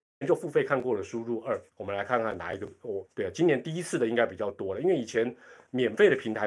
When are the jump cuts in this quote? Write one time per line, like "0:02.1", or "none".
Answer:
0:01.7
0:03.0